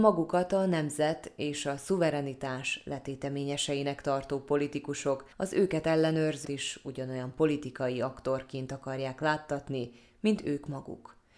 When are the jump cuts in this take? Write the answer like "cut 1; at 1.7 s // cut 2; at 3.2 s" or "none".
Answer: cut 1; at 5.3 s // cut 2; at 6.4 s